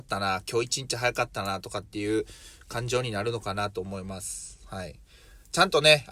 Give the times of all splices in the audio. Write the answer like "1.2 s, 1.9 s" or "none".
none